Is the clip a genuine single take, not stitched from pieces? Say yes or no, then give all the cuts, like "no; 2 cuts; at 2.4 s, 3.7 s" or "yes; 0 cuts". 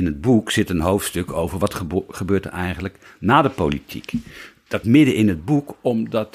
no; 1 cut; at 4.8 s